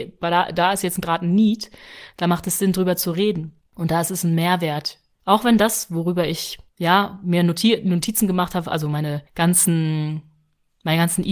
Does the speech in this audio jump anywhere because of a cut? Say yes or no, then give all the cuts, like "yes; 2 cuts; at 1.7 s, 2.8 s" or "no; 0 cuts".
yes; 4 cuts; at 3.7 s, 5.1 s, 6.7 s, 9.3 s